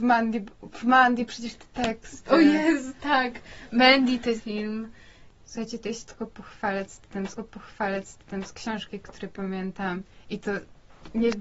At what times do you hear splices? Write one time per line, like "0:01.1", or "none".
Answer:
0:04.4
0:07.4